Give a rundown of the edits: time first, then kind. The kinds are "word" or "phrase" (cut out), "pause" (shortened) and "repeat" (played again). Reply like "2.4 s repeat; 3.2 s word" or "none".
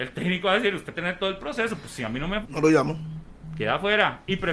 0.9 s word; 2.4 s word